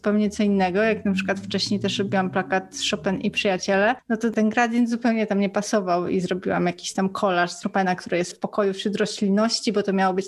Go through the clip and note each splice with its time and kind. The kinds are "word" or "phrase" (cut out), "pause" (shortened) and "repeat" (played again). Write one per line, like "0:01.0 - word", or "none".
0:07.6 - word
0:08.3 - word